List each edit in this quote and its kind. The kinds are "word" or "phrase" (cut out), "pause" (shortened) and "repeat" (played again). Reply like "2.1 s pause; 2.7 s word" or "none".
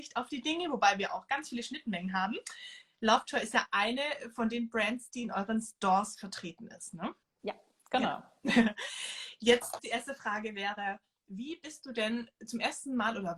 7.2 s pause; 9.8 s word